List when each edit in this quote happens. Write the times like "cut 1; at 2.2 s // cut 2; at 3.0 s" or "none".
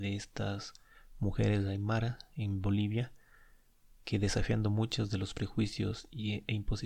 none